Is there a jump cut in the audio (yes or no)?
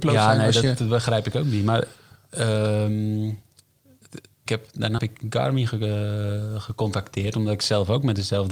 yes